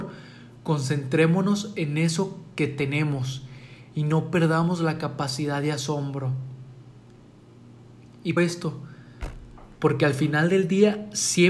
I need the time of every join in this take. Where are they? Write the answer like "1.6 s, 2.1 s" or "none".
8.4 s

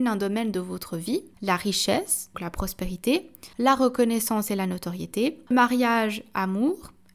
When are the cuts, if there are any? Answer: 2.3 s, 3.5 s, 5.5 s

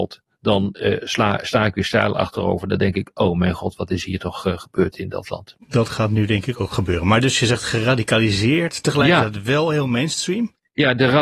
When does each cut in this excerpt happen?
none

